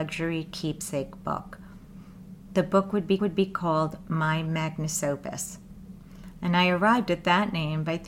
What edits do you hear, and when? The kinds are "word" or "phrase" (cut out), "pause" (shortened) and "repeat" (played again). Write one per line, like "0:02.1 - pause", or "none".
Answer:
0:03.2 - repeat